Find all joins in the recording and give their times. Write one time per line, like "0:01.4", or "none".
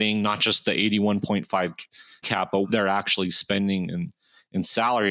0:02.2
0:02.6